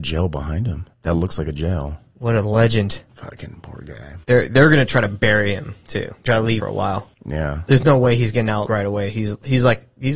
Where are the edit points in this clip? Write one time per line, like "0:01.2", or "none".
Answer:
0:00.9
0:03.1
0:04.2
0:06.3
0:06.6
0:07.1
0:08.7